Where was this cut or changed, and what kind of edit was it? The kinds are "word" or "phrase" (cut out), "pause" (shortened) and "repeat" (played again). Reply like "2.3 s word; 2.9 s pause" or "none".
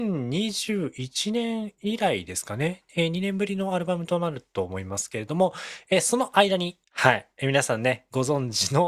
6.8 s pause